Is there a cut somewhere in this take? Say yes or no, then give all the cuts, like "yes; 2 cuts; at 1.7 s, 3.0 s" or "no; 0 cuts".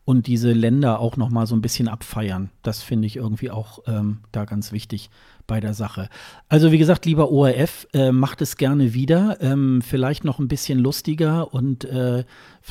no; 0 cuts